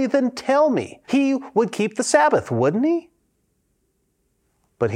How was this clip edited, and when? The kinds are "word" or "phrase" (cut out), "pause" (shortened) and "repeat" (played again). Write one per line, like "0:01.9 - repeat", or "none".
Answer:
0:01.0 - pause